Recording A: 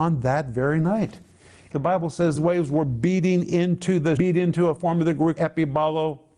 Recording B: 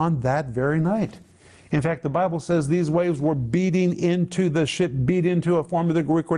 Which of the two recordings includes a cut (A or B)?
A